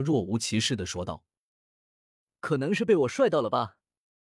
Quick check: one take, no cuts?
yes; 0 cuts

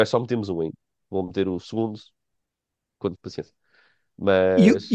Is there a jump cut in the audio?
yes; 1 cut; at 3.2 s

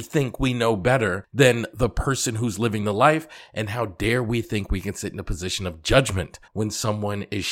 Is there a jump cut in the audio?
yes; 1 cut; at 6.5 s

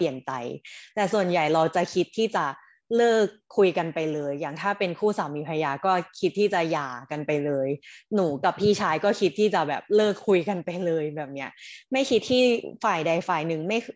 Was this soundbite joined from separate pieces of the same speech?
no; 0 cuts

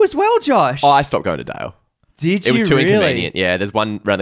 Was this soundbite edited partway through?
no; 0 cuts

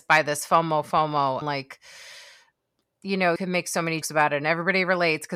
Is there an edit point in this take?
yes; 3 cuts; at 1.4 s, 3.4 s, 4.0 s

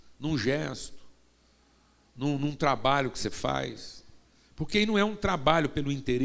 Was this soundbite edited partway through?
no; 0 cuts

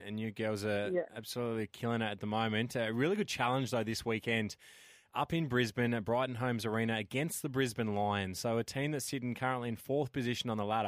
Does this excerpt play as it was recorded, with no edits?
yes; 0 cuts

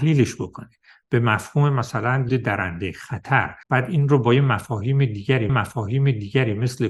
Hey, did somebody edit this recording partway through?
yes; 3 cuts; at 2.3 s, 3.6 s, 5.5 s

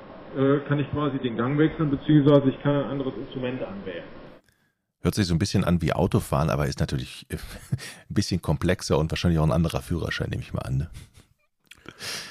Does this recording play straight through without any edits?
yes; 0 cuts

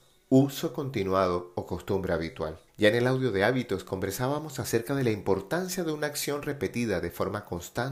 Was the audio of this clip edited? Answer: yes; 1 cut; at 2.7 s

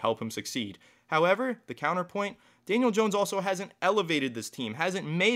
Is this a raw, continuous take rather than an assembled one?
yes; 0 cuts

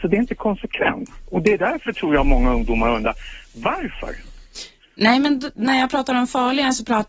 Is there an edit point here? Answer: no; 0 cuts

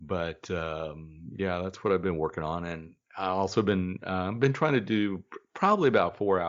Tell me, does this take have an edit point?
no; 0 cuts

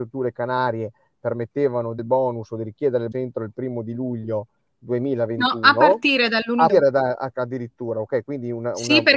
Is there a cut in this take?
yes; 3 cuts; at 2.0 s, 3.1 s, 6.7 s

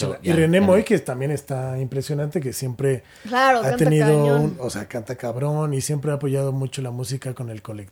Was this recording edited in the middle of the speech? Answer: no; 0 cuts

